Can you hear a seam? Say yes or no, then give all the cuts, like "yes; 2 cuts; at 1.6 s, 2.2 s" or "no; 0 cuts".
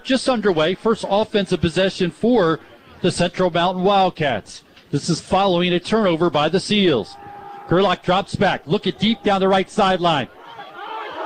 no; 0 cuts